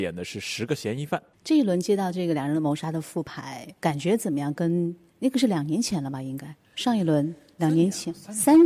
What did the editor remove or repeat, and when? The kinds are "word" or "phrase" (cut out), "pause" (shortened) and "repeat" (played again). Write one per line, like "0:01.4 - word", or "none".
0:03.8 - pause